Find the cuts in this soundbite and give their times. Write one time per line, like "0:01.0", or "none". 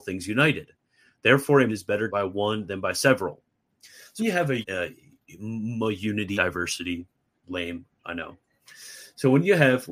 0:01.7
0:02.1
0:04.2
0:04.6
0:06.3
0:08.0